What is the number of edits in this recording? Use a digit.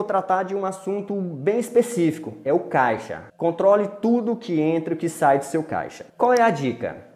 2